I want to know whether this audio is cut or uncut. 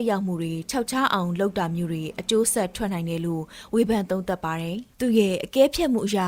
cut